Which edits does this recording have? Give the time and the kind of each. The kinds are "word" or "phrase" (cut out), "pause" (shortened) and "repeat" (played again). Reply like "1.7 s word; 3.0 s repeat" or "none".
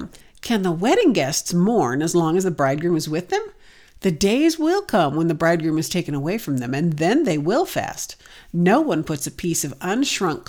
none